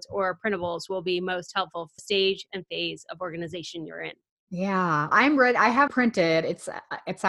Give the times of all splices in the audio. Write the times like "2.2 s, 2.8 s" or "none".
2.0 s, 5.1 s, 5.9 s